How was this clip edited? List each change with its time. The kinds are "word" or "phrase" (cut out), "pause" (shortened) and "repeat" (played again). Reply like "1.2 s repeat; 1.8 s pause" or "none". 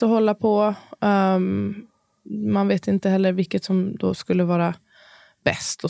none